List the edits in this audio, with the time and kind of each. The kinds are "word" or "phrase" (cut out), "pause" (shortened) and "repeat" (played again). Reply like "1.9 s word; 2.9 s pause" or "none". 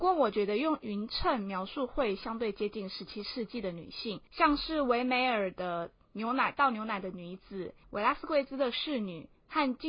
4.3 s pause; 7.8 s pause